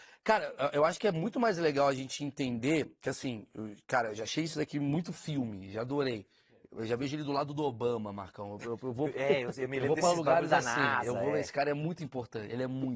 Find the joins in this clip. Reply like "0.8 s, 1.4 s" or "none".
none